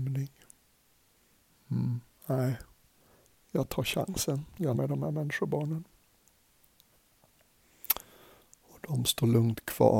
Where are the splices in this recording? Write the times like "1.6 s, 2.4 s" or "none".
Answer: 4.7 s

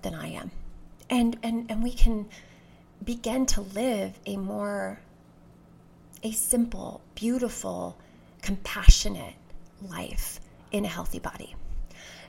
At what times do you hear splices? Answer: none

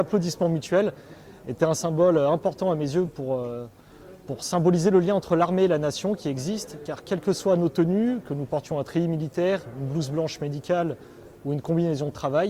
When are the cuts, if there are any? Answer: none

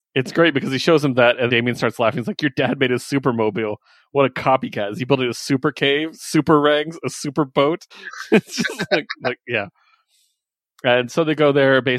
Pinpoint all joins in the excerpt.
1.5 s, 7.9 s

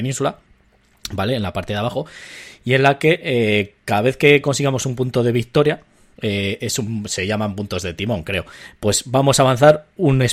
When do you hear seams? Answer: none

